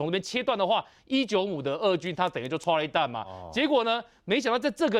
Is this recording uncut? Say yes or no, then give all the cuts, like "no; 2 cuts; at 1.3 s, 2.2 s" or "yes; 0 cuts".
yes; 0 cuts